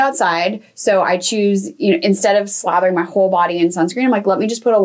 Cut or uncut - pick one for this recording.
uncut